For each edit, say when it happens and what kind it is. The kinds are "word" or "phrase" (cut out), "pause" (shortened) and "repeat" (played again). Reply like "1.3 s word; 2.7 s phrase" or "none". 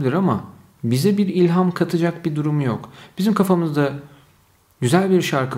none